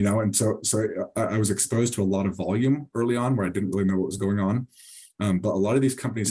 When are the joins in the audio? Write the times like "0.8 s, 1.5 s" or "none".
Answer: none